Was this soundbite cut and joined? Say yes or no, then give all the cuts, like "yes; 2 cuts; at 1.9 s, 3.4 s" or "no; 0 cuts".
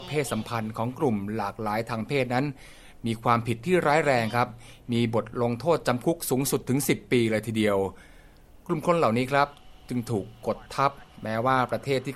no; 0 cuts